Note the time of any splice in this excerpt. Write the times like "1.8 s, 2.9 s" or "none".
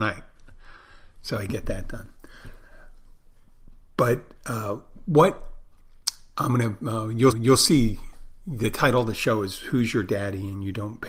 7.3 s